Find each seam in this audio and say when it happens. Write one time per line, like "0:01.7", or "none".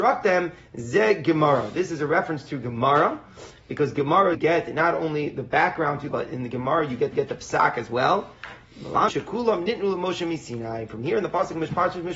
0:04.3
0:06.1
0:07.1
0:09.1